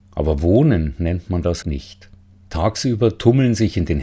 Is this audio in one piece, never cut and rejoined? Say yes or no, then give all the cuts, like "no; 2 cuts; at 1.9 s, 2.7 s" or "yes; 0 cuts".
no; 1 cut; at 1.6 s